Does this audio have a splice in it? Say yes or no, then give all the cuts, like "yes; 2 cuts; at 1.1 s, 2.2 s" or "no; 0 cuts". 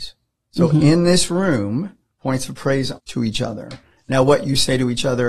yes; 1 cut; at 3.0 s